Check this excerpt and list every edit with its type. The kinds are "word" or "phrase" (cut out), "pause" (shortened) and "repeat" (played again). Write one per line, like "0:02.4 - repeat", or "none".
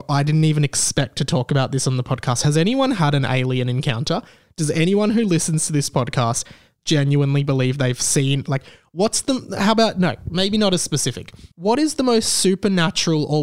0:11.5 - pause